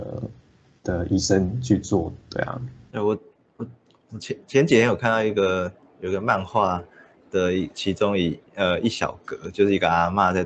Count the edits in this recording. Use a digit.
2